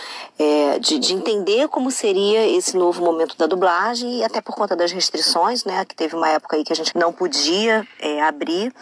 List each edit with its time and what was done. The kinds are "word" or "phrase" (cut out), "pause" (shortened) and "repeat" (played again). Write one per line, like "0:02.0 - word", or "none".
0:06.9 - word